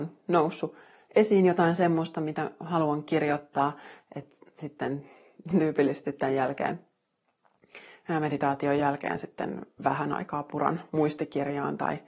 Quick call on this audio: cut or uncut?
uncut